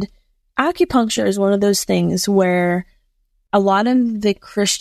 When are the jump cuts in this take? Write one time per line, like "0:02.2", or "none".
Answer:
none